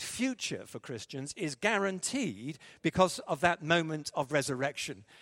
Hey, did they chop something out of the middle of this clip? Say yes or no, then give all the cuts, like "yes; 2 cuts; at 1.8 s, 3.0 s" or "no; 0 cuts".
no; 0 cuts